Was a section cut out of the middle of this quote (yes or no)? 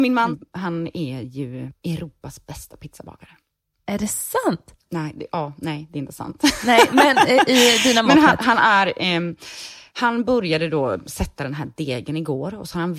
no